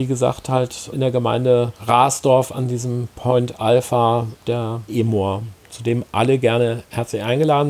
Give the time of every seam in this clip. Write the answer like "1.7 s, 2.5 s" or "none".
0.9 s, 4.9 s